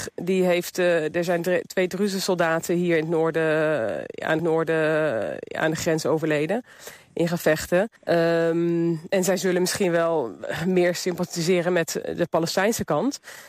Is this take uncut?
no; 2 cuts; at 4.4 s, 8.0 s

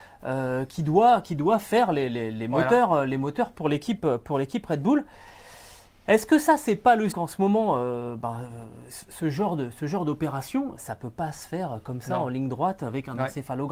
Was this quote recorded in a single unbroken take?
no; 2 cuts; at 7.1 s, 10.8 s

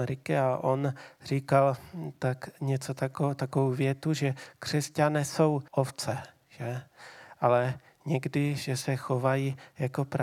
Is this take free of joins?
no; 1 cut; at 5.7 s

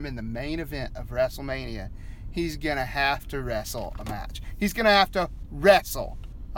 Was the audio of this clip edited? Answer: no; 0 cuts

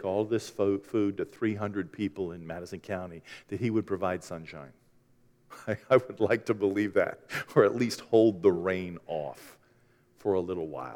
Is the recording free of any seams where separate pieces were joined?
yes; 0 cuts

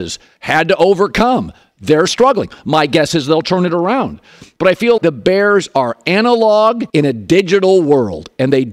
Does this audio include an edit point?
yes; 3 cuts; at 2.1 s, 5.0 s, 6.9 s

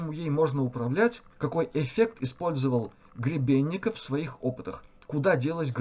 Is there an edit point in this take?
yes; 1 cut; at 1.3 s

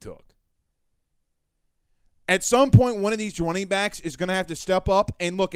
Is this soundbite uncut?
yes; 0 cuts

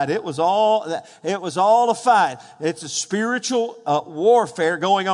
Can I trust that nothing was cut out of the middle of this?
yes; 0 cuts

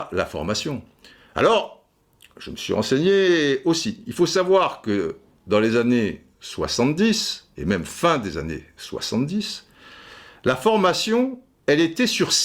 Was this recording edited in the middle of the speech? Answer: no; 0 cuts

